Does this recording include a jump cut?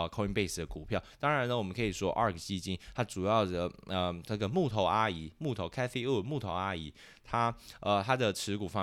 no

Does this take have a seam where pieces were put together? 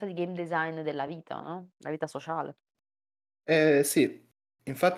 no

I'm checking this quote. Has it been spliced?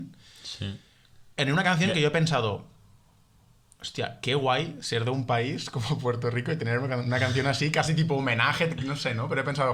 no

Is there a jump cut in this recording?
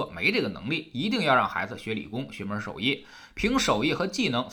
no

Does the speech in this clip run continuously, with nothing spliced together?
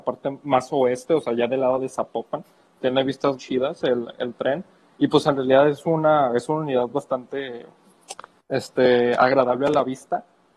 no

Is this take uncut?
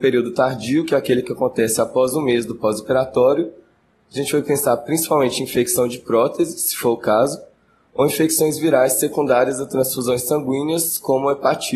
yes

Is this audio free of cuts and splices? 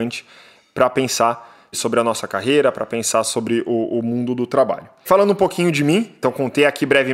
yes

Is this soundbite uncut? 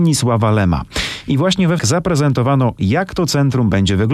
no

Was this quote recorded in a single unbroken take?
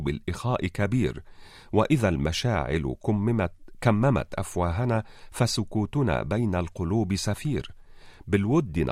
yes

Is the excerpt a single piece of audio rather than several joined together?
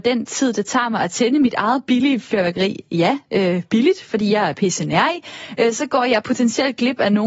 yes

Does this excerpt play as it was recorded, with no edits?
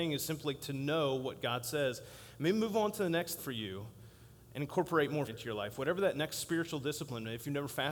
no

